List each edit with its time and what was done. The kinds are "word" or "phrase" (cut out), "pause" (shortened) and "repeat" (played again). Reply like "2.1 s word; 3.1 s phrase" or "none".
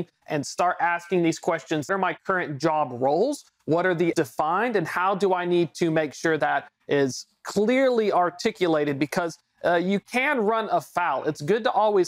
1.9 s phrase; 4.1 s word; 6.4 s word